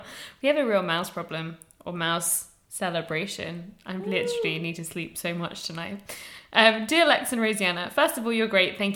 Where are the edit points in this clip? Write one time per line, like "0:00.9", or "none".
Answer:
none